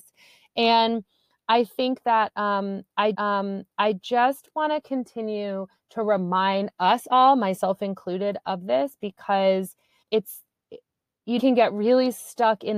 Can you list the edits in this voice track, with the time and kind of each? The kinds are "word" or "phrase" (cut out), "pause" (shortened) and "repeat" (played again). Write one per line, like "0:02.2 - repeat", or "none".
0:03.1 - repeat
0:10.0 - word
0:11.4 - phrase